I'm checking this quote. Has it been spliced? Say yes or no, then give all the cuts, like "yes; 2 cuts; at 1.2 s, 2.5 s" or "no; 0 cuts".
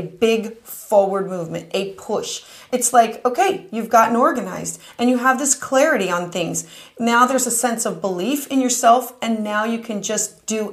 no; 0 cuts